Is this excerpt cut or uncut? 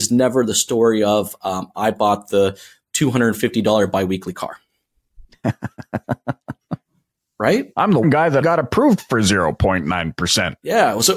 cut